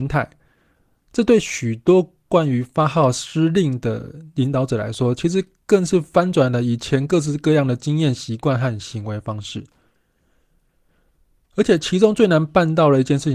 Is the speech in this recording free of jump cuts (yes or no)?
yes